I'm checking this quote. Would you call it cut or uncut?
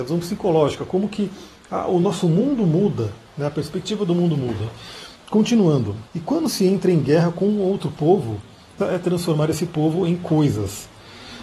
cut